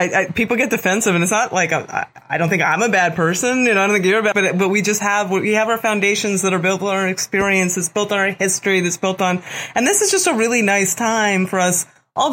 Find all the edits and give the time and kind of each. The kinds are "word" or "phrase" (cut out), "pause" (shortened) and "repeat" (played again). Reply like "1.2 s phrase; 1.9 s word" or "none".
4.3 s word